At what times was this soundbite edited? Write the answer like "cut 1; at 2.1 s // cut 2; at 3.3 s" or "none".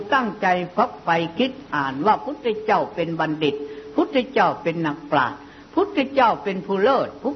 none